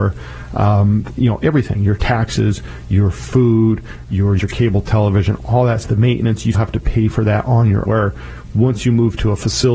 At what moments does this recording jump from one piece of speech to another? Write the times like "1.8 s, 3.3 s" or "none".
4.4 s, 5.8 s, 6.5 s, 7.9 s